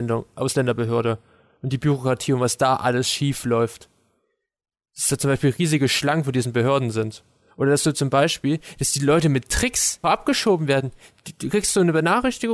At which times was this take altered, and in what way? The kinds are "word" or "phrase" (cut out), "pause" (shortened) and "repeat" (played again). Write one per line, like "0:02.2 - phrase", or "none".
0:10.0 - word